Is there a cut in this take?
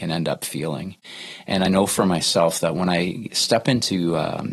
no; 0 cuts

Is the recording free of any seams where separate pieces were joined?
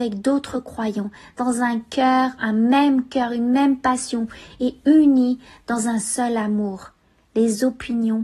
yes; 0 cuts

